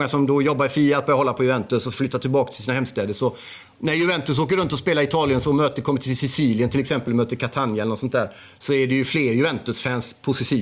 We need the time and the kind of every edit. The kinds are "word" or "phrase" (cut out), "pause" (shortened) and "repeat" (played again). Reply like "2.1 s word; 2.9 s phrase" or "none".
none